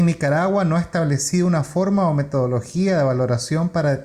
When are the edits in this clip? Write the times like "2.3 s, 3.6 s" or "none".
none